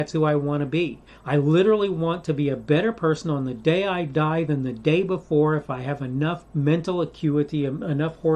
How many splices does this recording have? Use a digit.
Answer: 1